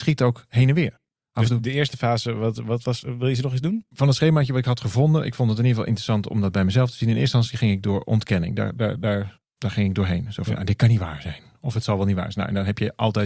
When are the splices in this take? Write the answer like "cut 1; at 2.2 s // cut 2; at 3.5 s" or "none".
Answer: none